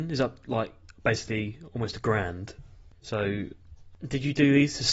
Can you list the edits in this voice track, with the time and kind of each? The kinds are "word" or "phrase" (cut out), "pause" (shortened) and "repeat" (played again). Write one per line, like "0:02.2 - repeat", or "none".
0:01.0 - pause